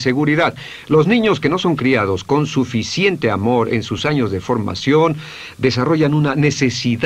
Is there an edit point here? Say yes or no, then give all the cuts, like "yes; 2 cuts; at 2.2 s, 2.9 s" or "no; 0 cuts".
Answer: no; 0 cuts